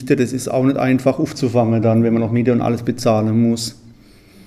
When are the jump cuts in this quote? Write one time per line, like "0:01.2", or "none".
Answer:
none